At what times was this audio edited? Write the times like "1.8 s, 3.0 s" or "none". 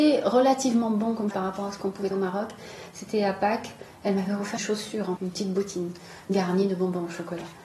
1.3 s, 2.1 s, 4.6 s, 5.2 s